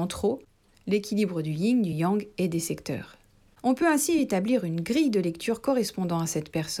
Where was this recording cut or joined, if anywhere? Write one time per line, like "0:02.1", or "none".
none